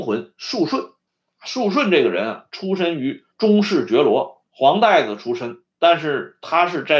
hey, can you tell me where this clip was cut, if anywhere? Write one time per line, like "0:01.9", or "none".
0:01.1
0:03.3
0:04.5
0:05.7